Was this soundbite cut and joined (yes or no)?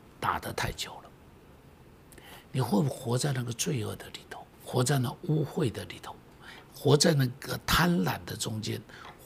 yes